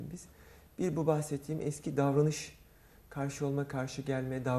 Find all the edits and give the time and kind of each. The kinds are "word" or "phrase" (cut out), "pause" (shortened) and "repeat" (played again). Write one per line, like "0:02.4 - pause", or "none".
none